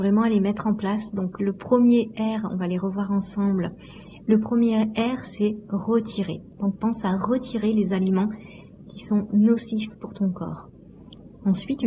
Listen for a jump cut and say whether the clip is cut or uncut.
uncut